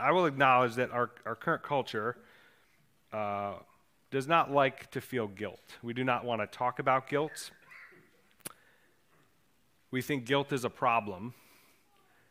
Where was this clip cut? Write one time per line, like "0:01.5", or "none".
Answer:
none